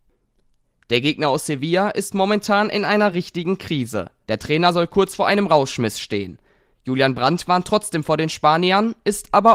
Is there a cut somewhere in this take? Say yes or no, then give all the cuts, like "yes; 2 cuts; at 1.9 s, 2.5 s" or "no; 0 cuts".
no; 0 cuts